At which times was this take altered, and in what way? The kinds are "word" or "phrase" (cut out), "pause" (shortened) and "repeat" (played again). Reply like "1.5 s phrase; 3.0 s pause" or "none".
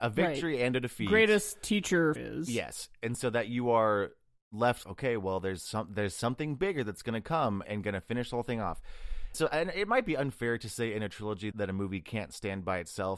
2.2 s word; 4.8 s word; 7.6 s word; 9.3 s word; 11.5 s word

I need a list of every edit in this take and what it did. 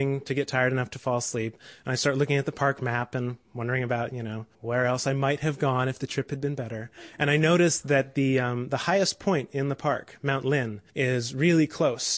4.5 s pause; 10.9 s pause

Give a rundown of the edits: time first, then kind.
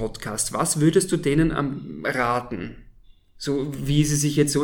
none

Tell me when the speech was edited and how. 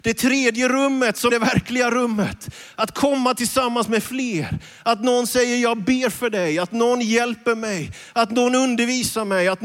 1.3 s word

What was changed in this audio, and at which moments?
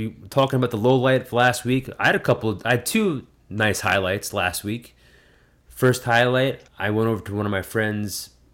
6.7 s pause

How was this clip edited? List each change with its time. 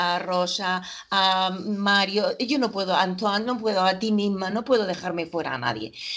none

